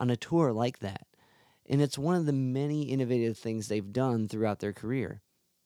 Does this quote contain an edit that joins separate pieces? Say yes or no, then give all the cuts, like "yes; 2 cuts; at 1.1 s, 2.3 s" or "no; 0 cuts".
no; 0 cuts